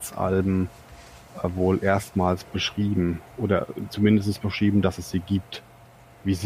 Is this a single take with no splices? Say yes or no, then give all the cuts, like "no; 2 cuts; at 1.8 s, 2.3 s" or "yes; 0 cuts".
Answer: yes; 0 cuts